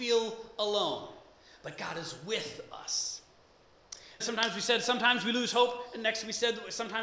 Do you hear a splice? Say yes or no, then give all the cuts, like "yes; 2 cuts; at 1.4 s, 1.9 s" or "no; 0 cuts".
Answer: yes; 1 cut; at 4.2 s